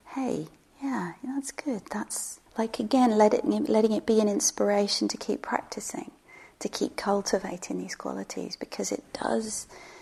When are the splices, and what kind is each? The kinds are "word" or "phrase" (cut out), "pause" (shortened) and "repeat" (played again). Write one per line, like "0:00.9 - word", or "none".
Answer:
0:02.5 - pause